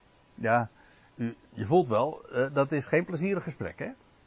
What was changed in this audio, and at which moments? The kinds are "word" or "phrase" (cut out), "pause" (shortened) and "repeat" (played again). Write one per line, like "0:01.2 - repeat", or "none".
0:01.5 - pause